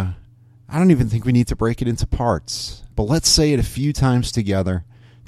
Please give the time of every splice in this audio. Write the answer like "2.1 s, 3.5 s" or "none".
2.9 s